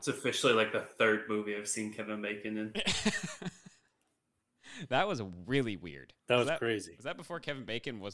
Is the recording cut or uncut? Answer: cut